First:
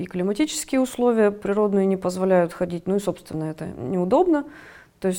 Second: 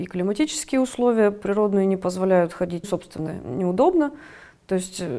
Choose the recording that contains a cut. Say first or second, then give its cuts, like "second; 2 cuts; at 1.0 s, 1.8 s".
second; 2 cuts; at 2.8 s, 3.3 s